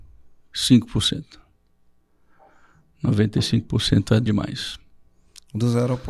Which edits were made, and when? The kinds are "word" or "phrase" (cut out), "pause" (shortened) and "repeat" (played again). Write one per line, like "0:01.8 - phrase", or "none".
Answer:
0:04.3 - word